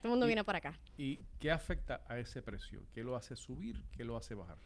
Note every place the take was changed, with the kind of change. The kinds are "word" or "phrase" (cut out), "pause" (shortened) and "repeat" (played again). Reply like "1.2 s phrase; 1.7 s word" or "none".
1.2 s word